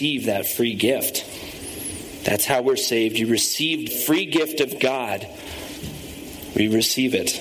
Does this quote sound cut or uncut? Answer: cut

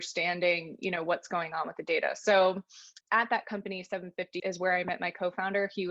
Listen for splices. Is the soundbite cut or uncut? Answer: cut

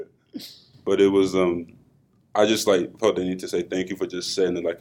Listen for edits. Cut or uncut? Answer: uncut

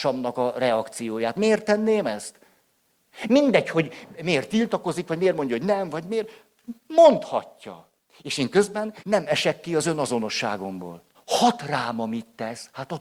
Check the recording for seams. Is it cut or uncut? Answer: cut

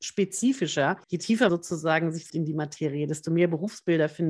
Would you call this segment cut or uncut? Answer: cut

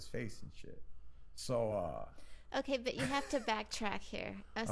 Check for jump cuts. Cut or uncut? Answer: uncut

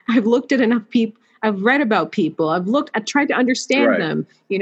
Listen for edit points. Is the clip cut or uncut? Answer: uncut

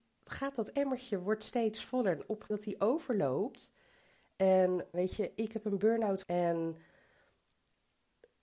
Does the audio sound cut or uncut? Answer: cut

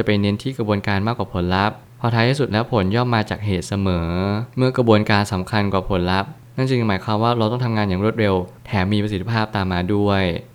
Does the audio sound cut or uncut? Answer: cut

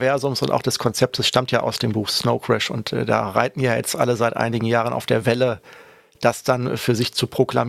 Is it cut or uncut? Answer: uncut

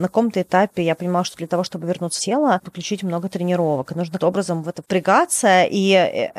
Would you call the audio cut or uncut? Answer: cut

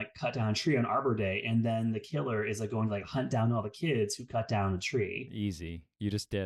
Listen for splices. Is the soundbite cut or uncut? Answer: uncut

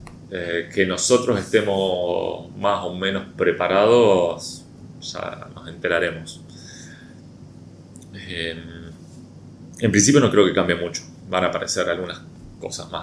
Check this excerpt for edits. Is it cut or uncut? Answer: uncut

